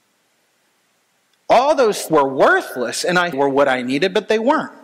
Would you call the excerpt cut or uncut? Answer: cut